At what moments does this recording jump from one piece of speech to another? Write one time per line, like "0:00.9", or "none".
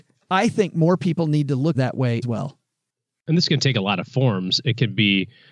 0:01.7
0:02.2